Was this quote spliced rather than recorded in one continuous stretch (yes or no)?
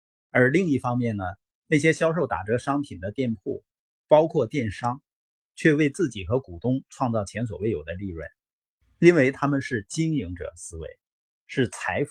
no